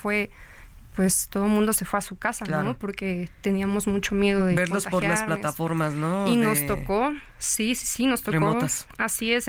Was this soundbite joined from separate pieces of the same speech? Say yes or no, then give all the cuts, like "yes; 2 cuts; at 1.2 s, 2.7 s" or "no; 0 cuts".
no; 0 cuts